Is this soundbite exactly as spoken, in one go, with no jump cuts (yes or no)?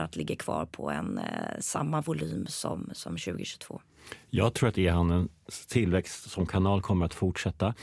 yes